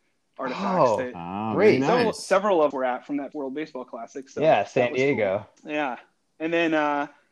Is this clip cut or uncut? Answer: cut